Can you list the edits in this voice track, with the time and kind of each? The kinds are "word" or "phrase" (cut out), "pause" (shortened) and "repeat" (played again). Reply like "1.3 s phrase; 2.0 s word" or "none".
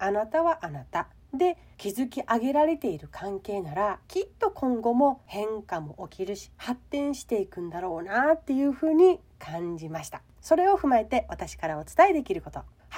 4.0 s pause